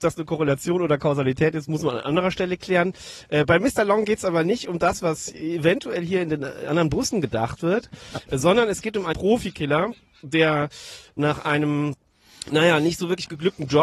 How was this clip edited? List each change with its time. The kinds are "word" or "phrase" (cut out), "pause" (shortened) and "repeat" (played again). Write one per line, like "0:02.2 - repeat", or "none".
0:09.1 - word